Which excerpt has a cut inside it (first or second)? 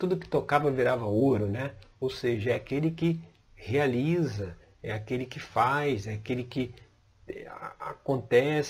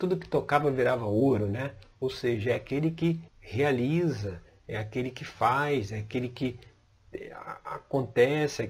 second